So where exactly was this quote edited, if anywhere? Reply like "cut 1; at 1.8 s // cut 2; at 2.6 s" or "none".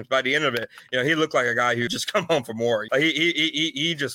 cut 1; at 1.9 s // cut 2; at 2.9 s